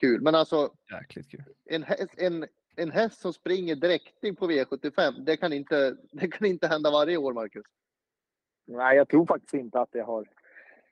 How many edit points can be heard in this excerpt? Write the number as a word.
zero